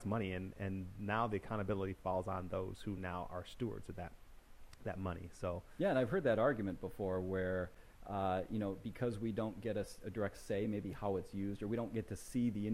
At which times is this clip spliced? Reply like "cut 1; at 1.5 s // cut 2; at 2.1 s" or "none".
none